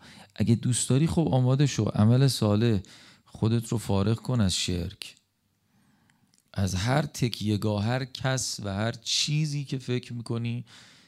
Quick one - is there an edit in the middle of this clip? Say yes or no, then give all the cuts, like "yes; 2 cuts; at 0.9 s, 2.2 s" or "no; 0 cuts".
no; 0 cuts